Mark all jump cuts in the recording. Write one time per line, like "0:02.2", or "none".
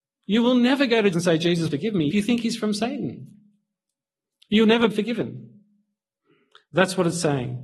0:01.1
0:01.7
0:02.1
0:04.9